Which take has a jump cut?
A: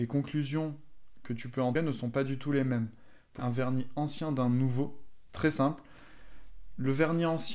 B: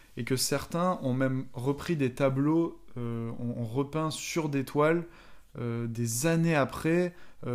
A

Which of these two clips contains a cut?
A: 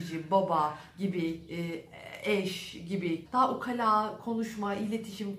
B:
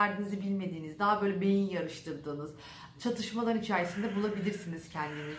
A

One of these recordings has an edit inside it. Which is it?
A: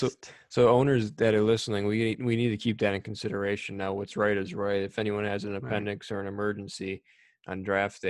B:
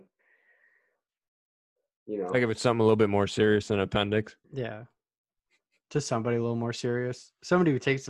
B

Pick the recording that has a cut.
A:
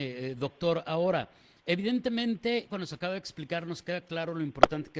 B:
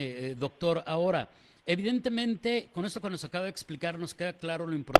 A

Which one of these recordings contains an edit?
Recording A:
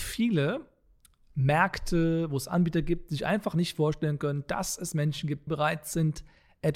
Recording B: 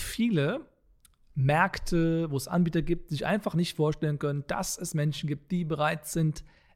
A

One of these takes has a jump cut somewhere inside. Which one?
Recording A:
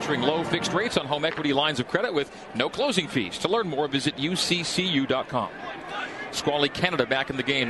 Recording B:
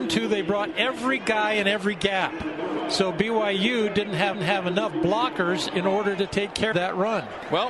B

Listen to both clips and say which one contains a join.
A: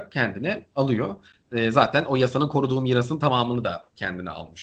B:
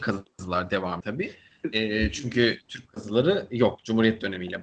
B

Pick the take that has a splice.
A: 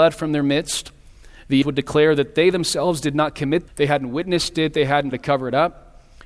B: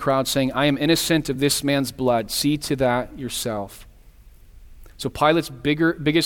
A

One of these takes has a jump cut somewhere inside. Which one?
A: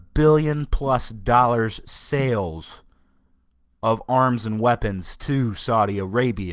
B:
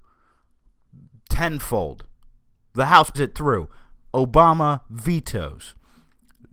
B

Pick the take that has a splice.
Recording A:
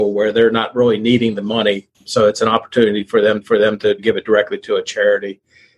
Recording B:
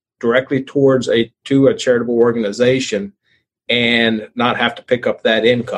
A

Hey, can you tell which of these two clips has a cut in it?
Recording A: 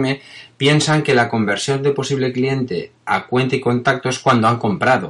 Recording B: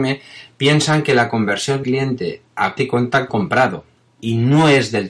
B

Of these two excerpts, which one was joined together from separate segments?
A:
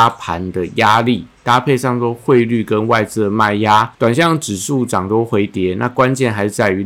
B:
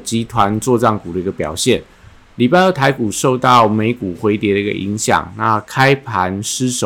A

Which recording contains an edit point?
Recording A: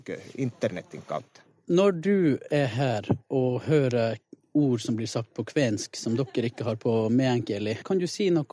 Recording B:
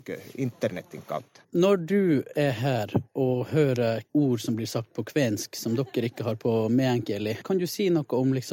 B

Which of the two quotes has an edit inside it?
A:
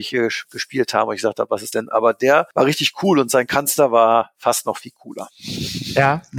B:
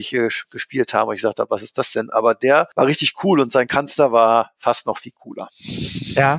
A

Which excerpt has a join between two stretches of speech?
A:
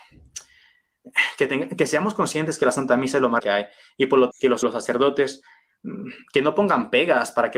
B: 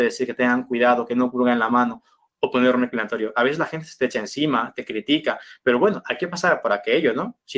A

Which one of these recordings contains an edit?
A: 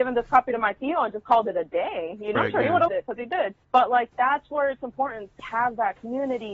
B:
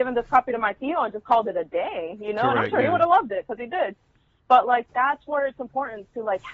A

